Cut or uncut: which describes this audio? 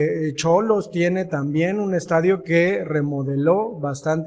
uncut